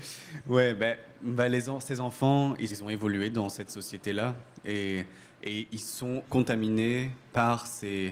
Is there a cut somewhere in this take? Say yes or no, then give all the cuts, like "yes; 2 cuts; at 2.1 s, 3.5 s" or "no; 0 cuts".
yes; 2 cuts; at 2.7 s, 6.3 s